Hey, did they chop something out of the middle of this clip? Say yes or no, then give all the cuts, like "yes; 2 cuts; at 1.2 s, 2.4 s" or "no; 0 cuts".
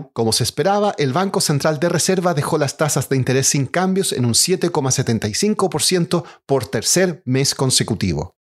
no; 0 cuts